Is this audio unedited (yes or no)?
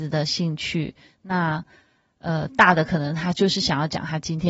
yes